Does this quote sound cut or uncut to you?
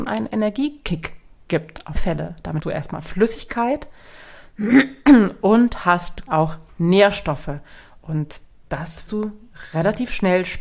cut